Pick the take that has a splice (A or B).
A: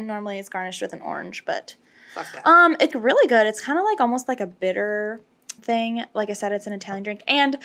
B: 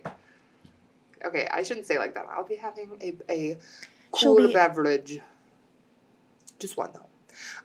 A